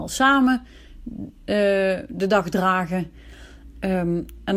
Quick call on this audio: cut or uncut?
uncut